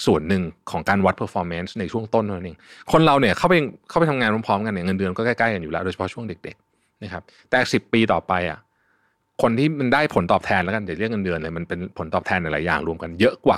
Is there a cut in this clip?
no; 0 cuts

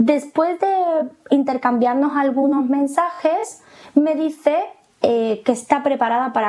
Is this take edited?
no; 0 cuts

